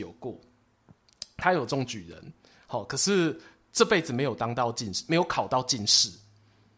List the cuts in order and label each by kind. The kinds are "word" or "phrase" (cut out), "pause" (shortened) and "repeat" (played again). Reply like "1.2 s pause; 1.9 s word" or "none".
none

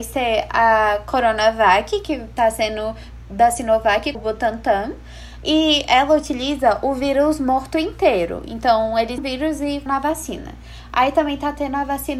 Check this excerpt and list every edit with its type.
4.1 s word; 9.2 s word; 9.9 s word

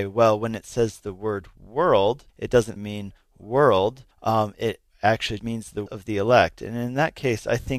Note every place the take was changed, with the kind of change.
2.3 s pause; 2.8 s word; 4.1 s pause; 5.4 s word; 5.9 s word

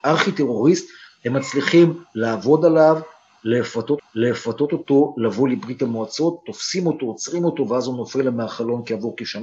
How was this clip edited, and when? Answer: 4.0 s repeat

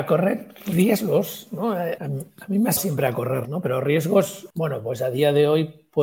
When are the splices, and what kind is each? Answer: 2.0 s word; 2.8 s word; 3.4 s word; 4.5 s pause

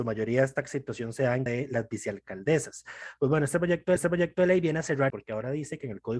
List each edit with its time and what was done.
1.5 s word; 4.0 s repeat; 5.1 s word

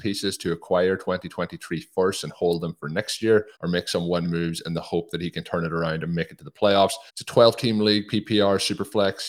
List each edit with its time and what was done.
3.6 s pause; 4.2 s word; 7.1 s pause

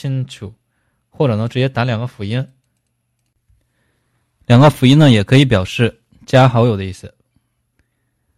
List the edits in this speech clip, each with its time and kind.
none

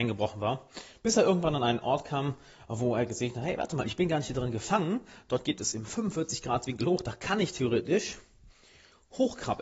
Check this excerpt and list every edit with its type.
none

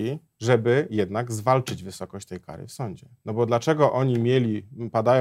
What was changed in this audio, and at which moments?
none

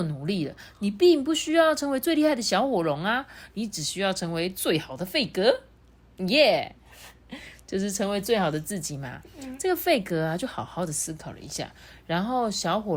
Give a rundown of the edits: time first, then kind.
none

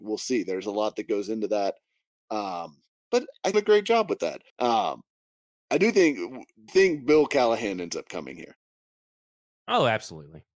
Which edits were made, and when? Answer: 2.9 s pause; 3.5 s phrase; 4.5 s pause; 6.7 s word

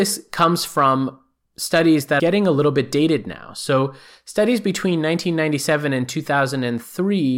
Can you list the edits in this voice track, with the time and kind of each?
2.2 s word

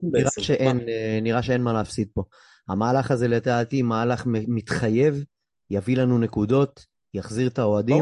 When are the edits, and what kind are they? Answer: none

